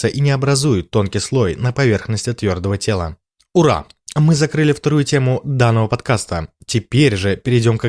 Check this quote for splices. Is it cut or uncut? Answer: uncut